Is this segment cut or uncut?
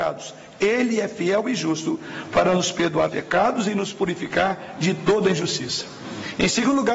cut